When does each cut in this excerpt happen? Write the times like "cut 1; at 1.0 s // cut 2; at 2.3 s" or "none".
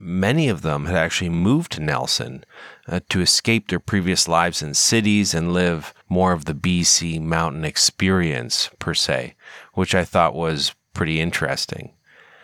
cut 1; at 6.0 s